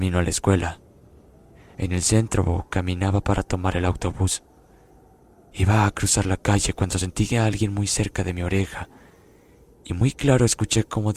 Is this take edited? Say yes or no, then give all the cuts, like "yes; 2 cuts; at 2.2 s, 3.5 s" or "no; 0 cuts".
no; 0 cuts